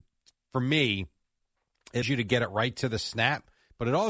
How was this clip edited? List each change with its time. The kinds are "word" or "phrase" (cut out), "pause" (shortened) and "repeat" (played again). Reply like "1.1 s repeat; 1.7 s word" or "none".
2.0 s word

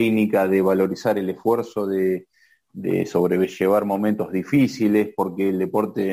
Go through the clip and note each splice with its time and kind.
none

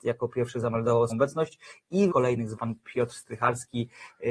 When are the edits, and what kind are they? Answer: 1.1 s word; 2.1 s word; 2.5 s word

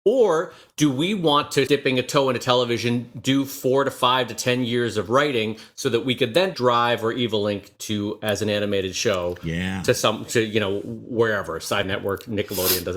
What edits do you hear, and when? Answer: 1.7 s word; 6.5 s word; 11.8 s word

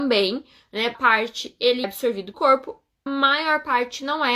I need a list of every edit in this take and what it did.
0.9 s word; 1.8 s word; 2.3 s word; 3.1 s word

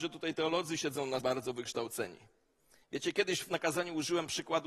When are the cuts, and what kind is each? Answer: 1.2 s word

